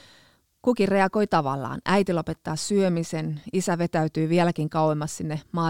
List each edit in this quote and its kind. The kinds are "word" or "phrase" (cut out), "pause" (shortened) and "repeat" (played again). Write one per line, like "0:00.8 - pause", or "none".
none